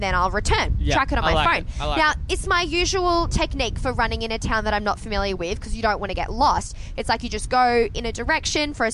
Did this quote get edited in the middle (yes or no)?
no